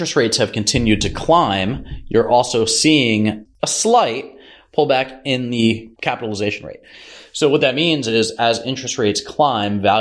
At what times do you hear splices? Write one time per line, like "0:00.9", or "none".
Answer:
0:03.5